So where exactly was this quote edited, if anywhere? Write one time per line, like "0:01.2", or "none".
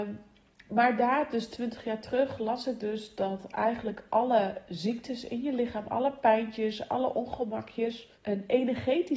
0:08.1